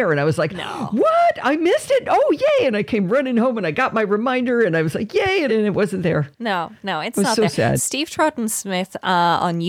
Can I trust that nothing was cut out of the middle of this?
no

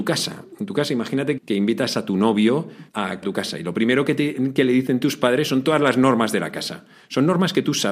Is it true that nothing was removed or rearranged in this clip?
no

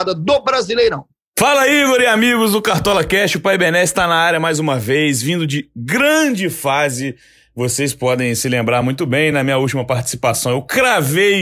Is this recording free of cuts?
yes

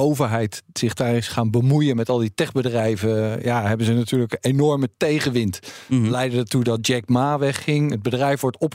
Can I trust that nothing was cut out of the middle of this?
yes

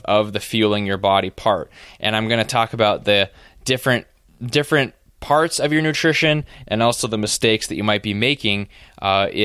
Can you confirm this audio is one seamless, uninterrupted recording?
yes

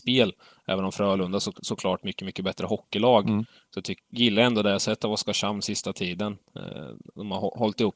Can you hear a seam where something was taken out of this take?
yes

